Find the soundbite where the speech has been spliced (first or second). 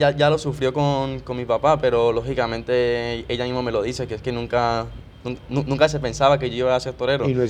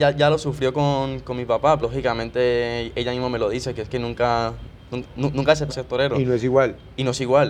second